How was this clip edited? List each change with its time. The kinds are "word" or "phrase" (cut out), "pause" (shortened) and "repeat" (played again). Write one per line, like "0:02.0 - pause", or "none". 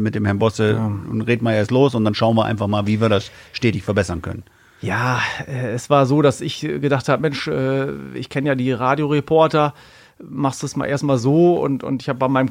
none